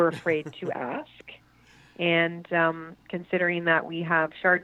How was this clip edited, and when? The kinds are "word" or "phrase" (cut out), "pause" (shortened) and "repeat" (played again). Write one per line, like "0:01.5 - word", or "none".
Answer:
none